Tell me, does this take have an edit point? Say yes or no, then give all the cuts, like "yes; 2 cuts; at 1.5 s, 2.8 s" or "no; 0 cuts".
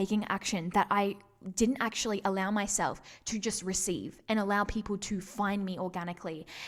no; 0 cuts